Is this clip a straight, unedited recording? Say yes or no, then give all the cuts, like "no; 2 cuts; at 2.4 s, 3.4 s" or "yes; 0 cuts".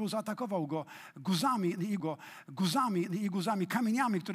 no; 1 cut; at 2.0 s